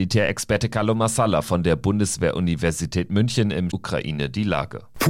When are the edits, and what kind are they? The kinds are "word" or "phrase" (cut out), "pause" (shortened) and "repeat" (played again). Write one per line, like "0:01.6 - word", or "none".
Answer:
0:03.7 - word